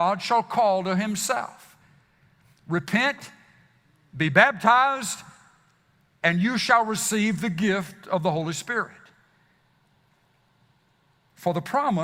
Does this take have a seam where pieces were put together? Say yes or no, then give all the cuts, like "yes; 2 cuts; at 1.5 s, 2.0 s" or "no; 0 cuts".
no; 0 cuts